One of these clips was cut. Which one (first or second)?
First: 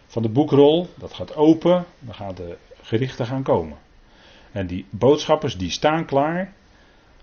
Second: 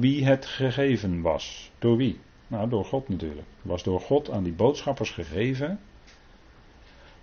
second